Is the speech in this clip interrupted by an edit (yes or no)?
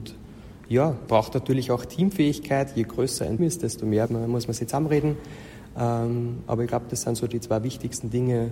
yes